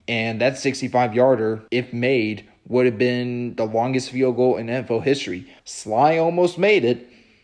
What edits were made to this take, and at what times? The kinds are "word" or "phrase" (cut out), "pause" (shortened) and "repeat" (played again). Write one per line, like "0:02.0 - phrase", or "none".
0:01.7 - pause
0:05.6 - pause